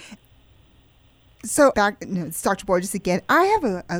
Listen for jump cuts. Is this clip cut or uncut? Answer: cut